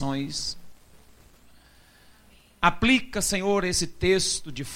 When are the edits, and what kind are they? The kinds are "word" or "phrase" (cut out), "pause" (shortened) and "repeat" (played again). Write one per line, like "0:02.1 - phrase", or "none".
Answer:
none